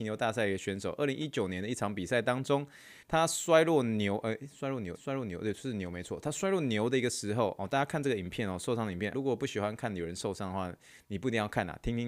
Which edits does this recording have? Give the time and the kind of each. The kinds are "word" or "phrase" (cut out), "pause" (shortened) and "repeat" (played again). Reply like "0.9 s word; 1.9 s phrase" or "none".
3.0 s pause; 4.9 s repeat; 9.1 s word